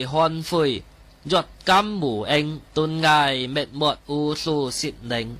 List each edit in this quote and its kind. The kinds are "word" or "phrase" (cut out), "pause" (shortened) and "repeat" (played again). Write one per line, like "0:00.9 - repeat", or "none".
0:02.7 - pause
0:04.0 - pause